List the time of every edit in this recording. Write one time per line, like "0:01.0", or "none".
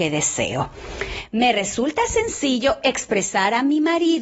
none

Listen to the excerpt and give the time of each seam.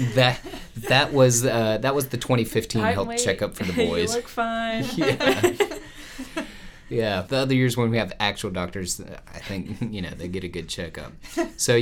0:07.3

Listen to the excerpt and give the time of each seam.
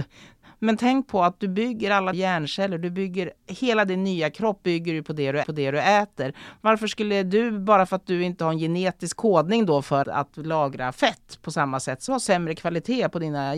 0:02.1
0:03.4
0:05.4
0:10.0
0:12.1

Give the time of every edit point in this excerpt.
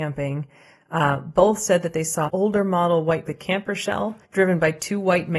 0:02.3
0:03.3
0:04.2

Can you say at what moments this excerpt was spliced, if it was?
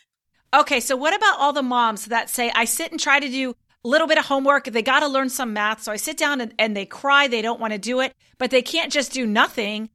none

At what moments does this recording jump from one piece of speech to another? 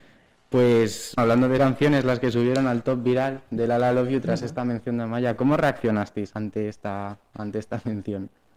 0:01.2
0:01.6
0:06.3

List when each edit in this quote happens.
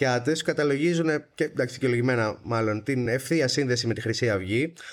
none

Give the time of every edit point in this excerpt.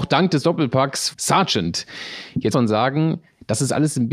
0:01.1
0:02.5

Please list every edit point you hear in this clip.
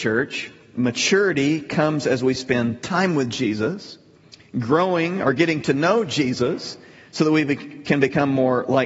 none

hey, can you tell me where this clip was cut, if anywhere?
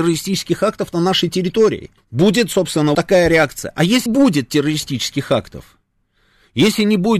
0:02.0
0:02.9
0:04.1

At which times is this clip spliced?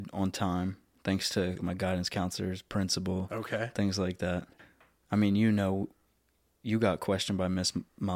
0:01.6

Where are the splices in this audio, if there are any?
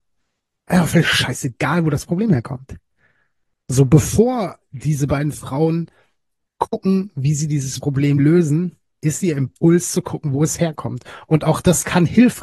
none

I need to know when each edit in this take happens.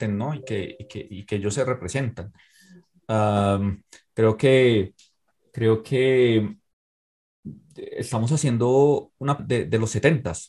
0:09.4

